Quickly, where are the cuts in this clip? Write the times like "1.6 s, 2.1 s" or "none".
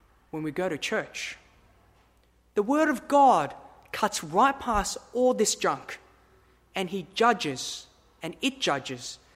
none